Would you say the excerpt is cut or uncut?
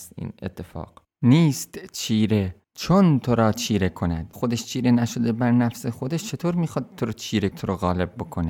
cut